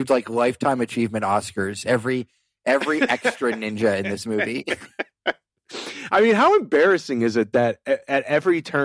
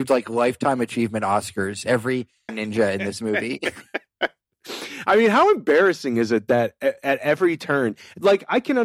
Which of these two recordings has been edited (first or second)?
second